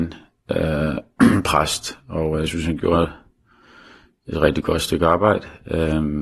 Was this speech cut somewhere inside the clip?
no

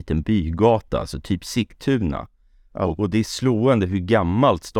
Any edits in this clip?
no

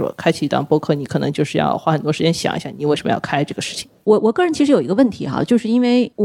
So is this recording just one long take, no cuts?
no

